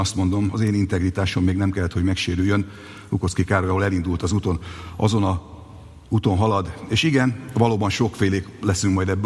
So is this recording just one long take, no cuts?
yes; 0 cuts

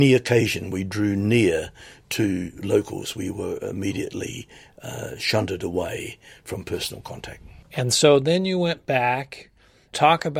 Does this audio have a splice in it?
no; 0 cuts

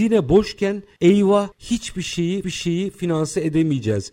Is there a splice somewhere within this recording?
yes; 2 cuts; at 1.5 s, 2.4 s

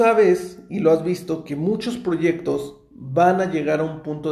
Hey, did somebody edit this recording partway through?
no; 0 cuts

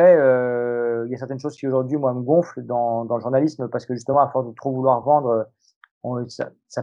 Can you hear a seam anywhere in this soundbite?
no; 0 cuts

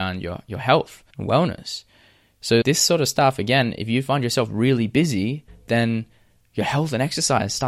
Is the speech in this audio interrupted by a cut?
yes; 2 cuts; at 1.1 s, 2.6 s

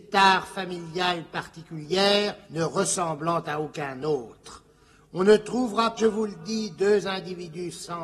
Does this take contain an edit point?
yes; 2 cuts; at 2.4 s, 6.0 s

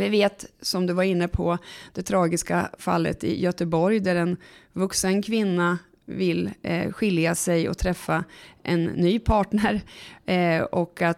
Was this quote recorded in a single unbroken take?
yes; 0 cuts

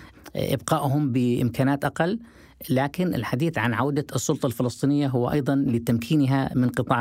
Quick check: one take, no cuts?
yes; 0 cuts

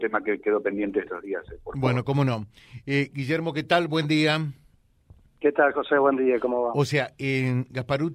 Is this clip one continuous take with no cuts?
yes; 0 cuts

